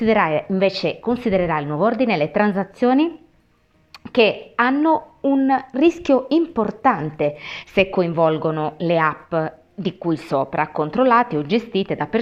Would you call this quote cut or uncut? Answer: uncut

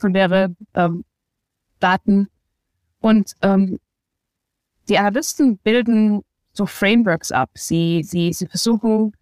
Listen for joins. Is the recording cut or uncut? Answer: uncut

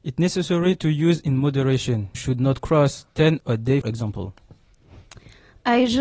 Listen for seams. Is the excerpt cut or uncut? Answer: cut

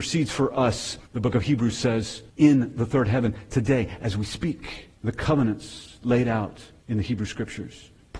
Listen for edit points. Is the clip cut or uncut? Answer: cut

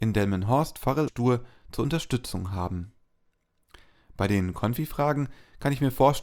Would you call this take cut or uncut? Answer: cut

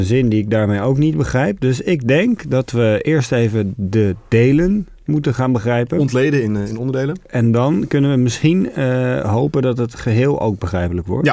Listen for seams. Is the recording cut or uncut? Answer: uncut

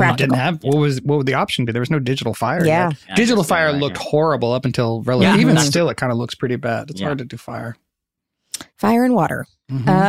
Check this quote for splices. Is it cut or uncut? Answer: cut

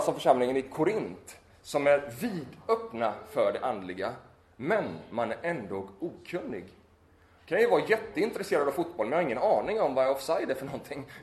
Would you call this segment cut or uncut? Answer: uncut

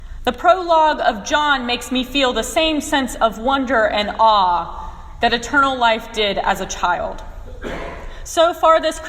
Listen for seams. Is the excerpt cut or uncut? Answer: uncut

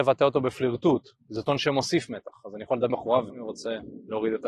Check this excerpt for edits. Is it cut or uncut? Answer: cut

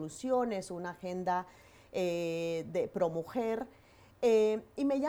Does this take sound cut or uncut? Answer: uncut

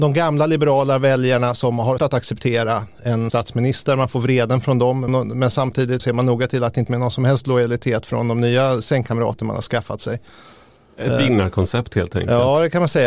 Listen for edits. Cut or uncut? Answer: cut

